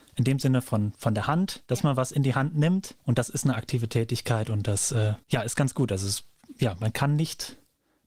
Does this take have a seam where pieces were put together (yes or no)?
yes